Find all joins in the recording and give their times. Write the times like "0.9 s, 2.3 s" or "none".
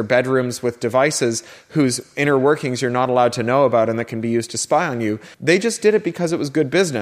5.3 s